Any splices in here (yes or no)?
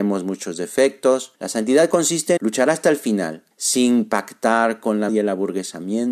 yes